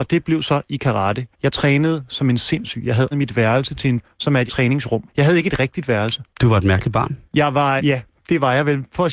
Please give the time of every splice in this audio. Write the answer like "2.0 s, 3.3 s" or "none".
1.3 s, 3.1 s, 4.0 s, 4.5 s, 5.1 s, 6.3 s, 7.2 s, 7.8 s